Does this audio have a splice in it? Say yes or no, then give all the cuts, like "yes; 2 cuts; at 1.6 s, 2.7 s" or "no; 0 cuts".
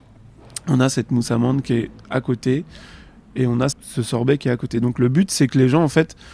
yes; 1 cut; at 3.7 s